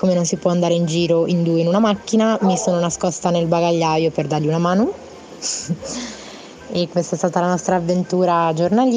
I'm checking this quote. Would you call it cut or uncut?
uncut